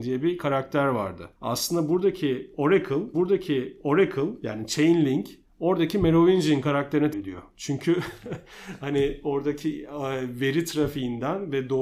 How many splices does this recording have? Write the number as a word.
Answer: four